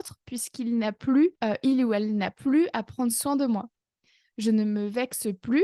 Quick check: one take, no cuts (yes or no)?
yes